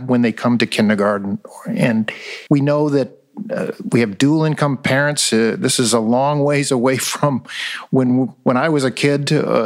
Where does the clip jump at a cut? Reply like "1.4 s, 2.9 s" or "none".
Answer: 2.5 s